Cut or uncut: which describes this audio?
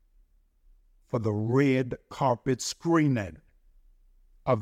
uncut